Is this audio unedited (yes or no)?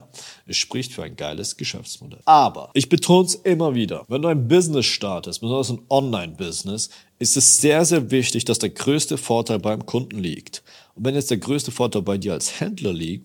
yes